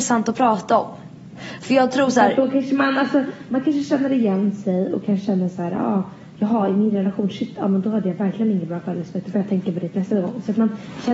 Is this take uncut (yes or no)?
yes